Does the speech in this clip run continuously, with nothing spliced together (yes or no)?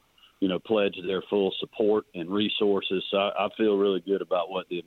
yes